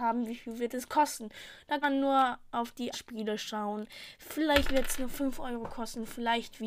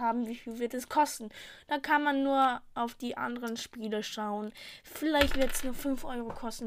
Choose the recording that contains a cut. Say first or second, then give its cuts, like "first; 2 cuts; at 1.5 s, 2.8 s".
first; 2 cuts; at 1.8 s, 2.9 s